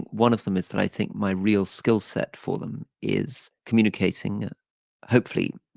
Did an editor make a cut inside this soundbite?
yes; 1 cut; at 3.6 s

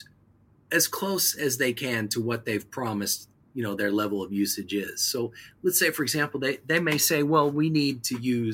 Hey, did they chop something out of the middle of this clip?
no; 0 cuts

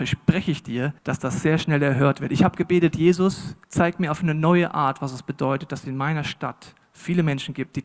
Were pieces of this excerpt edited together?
yes; 2 cuts; at 1.0 s, 3.6 s

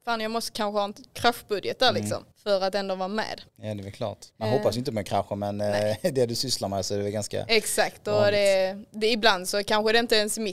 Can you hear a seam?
yes; 3 cuts; at 2.3 s, 3.5 s, 4.3 s

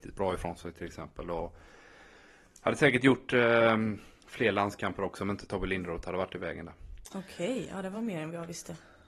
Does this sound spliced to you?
no; 0 cuts

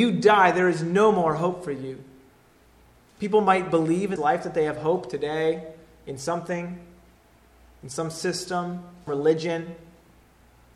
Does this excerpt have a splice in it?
yes; 2 cuts; at 4.2 s, 9.1 s

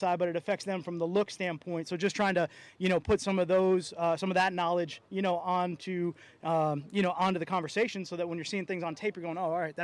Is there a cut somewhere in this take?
no; 0 cuts

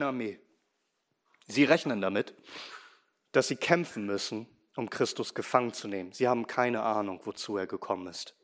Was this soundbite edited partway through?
no; 0 cuts

